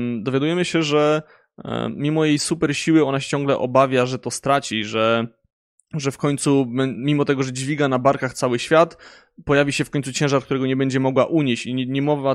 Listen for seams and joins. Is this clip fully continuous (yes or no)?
yes